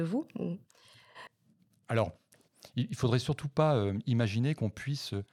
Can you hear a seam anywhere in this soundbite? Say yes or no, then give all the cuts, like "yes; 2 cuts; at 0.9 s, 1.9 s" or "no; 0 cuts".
no; 0 cuts